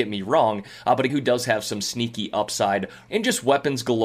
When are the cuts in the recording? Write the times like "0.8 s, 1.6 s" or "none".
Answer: 1.1 s, 3.1 s